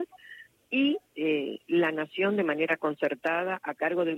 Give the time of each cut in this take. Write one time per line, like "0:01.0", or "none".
0:01.1

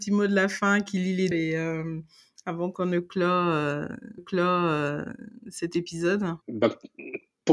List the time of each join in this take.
0:01.3
0:04.2
0:06.4

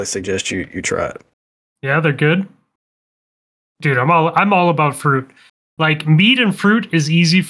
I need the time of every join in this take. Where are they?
none

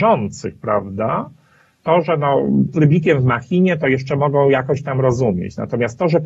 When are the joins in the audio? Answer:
0:02.7

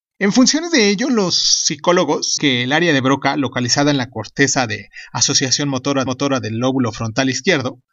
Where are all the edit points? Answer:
0:02.4
0:06.1

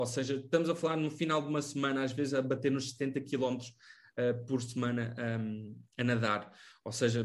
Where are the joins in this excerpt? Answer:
none

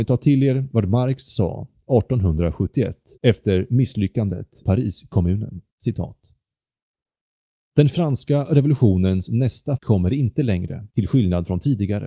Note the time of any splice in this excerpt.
0:03.2
0:04.6
0:05.7
0:09.8
0:10.9

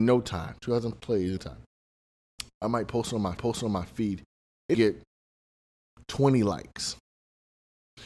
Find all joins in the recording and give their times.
0:00.9
0:01.4
0:03.4
0:04.7

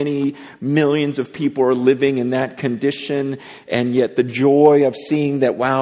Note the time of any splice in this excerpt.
none

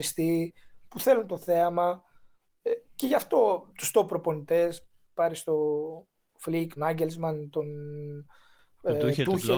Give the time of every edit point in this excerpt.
0:03.7
0:06.8

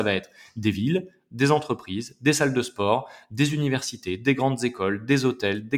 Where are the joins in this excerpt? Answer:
none

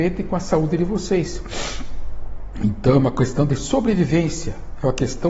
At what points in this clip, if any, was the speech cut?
none

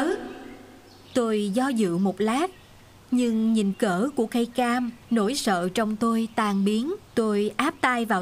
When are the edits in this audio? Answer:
0:03.7
0:05.0
0:07.1

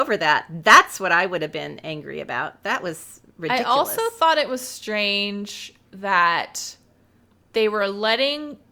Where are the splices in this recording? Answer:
none

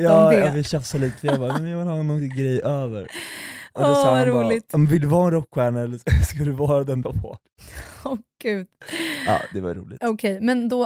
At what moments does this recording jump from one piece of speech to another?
0:07.0

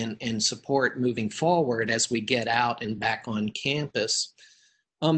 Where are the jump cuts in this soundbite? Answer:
none

